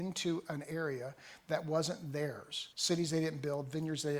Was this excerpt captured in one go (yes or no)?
no